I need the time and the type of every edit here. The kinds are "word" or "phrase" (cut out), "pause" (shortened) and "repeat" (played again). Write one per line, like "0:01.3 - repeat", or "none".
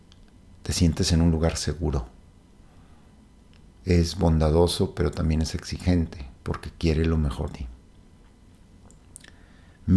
0:06.4 - pause
0:07.5 - word